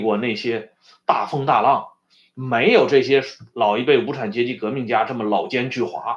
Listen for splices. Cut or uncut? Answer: uncut